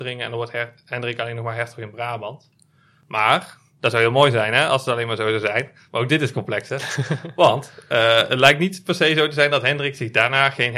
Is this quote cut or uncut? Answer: uncut